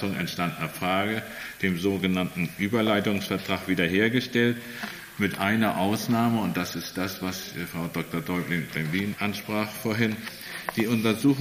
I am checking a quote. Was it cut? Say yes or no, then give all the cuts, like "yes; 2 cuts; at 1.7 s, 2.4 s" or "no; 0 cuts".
yes; 1 cut; at 9.2 s